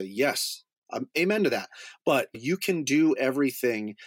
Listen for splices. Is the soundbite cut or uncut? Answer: cut